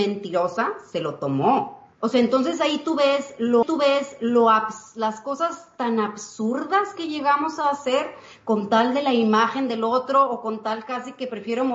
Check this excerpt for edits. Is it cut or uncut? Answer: cut